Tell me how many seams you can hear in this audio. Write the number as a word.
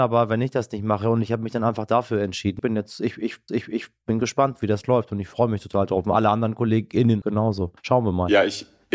four